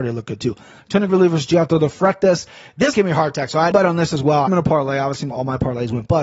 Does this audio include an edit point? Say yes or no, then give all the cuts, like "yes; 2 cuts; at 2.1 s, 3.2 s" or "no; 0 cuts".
yes; 4 cuts; at 1.1 s, 2.9 s, 3.7 s, 4.5 s